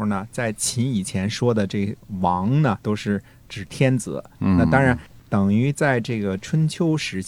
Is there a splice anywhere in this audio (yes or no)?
no